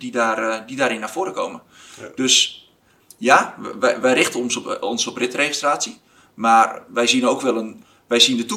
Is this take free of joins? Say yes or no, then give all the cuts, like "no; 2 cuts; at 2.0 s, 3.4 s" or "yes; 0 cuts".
yes; 0 cuts